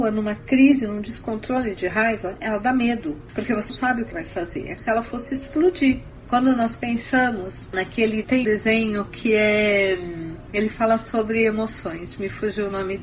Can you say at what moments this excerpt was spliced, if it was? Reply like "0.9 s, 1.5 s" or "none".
3.7 s, 4.1 s, 4.8 s, 8.4 s